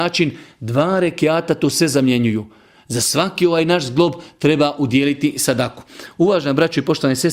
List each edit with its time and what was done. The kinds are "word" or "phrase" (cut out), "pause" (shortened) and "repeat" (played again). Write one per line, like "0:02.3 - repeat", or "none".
none